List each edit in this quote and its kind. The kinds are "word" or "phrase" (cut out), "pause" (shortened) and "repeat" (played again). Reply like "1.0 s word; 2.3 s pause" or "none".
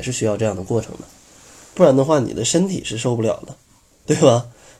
none